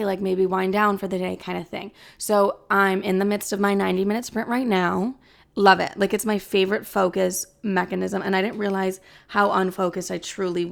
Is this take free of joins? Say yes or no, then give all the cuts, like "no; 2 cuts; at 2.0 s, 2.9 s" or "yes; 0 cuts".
yes; 0 cuts